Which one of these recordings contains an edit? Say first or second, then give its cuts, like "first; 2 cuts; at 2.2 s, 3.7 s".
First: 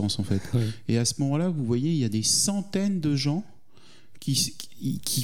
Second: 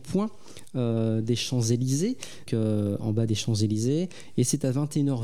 second; 2 cuts; at 2.5 s, 3.3 s